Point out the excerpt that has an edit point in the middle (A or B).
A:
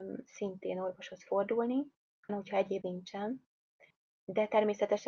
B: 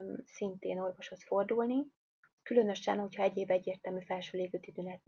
A